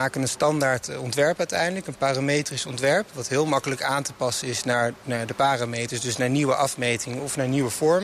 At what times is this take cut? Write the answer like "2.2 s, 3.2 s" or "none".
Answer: none